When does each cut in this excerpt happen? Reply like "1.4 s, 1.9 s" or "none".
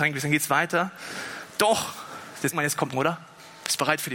2.5 s, 2.9 s